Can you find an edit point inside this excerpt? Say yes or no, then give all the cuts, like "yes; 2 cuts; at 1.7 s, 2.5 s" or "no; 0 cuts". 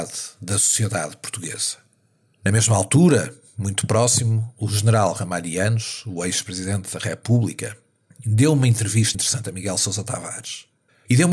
yes; 1 cut; at 9.1 s